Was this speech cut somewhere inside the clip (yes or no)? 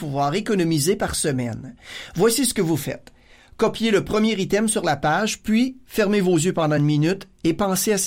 no